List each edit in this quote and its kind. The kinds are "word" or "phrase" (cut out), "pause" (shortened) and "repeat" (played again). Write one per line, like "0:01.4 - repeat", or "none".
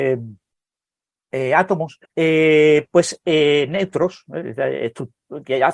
0:02.0 - pause